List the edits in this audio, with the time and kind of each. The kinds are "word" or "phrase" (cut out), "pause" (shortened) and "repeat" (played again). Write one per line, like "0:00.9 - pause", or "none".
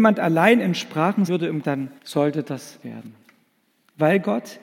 0:01.3 - word
0:01.6 - word
0:02.0 - pause
0:02.8 - word